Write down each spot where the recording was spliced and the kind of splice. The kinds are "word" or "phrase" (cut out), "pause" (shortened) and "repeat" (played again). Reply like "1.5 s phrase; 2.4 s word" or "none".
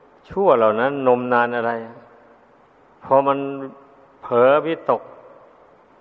none